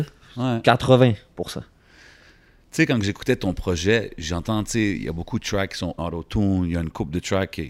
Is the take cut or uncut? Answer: cut